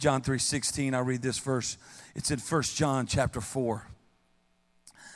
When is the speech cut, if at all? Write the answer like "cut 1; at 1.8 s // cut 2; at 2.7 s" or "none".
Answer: none